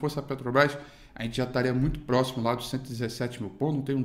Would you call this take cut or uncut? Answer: uncut